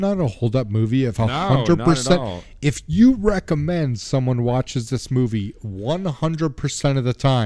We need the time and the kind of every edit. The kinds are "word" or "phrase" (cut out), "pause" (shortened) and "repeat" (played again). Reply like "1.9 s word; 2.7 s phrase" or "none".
none